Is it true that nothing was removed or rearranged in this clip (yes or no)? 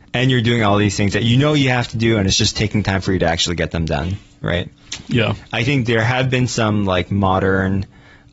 yes